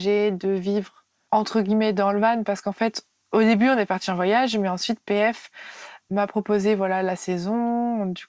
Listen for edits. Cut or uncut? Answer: uncut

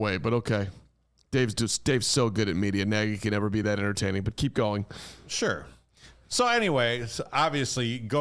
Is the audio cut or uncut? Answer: uncut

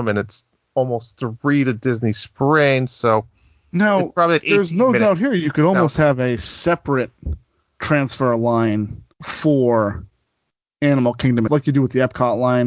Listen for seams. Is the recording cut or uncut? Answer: cut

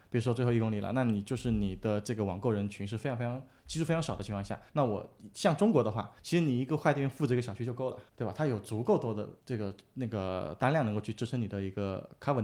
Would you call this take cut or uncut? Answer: cut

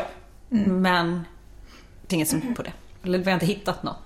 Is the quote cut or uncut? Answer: cut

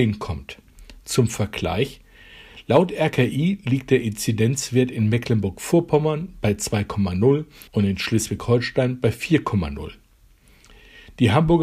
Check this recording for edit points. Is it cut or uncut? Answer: cut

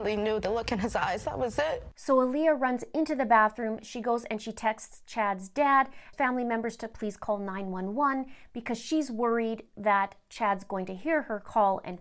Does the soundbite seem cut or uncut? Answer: cut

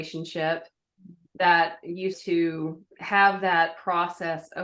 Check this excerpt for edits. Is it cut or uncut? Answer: cut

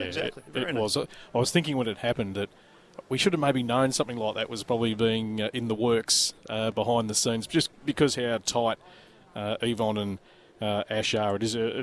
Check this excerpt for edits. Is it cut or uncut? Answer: uncut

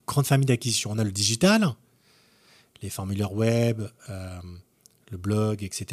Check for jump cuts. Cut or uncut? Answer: uncut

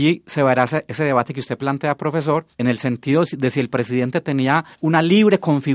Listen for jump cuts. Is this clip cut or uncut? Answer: cut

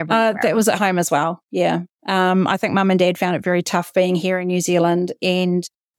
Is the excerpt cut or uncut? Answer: uncut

